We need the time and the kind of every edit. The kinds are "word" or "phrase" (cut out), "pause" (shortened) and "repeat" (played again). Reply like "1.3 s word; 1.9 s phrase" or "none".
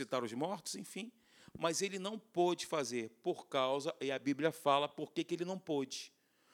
none